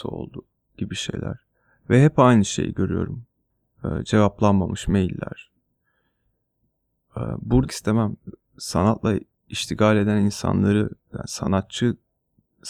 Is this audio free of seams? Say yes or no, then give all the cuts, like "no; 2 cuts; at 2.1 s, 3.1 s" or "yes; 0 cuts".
no; 3 cuts; at 3.5 s, 7.7 s, 9.3 s